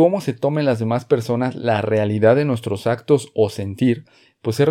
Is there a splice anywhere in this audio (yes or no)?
no